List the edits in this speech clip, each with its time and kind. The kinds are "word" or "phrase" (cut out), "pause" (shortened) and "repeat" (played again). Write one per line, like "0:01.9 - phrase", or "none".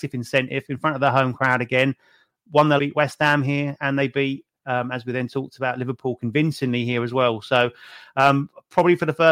0:02.8 - phrase